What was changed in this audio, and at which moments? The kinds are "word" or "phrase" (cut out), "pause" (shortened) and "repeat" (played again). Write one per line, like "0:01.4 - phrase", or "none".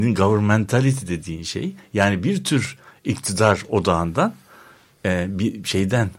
none